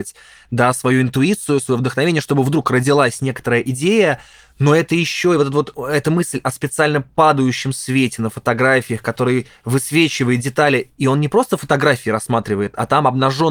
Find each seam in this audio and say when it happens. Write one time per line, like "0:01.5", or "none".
none